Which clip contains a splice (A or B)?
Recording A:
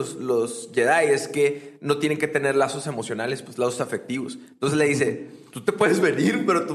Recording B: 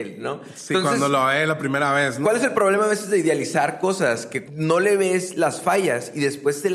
B